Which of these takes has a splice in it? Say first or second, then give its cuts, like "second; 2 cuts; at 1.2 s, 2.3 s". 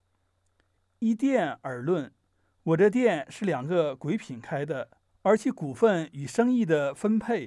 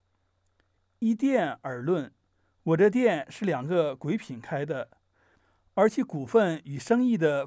first; 1 cut; at 5.1 s